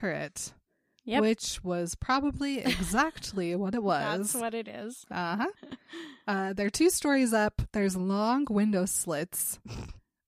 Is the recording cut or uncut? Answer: uncut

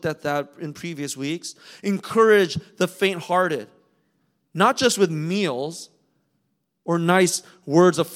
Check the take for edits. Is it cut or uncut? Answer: uncut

